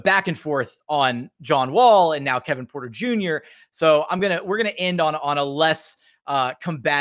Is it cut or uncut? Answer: uncut